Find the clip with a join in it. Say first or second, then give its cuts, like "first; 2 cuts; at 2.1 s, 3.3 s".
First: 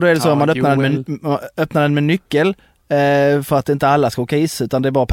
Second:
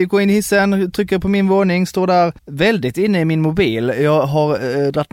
second; 1 cut; at 2.4 s